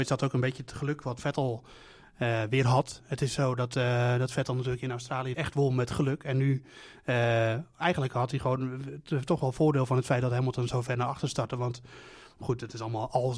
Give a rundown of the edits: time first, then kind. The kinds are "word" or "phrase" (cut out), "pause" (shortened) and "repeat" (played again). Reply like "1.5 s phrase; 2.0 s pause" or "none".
5.3 s phrase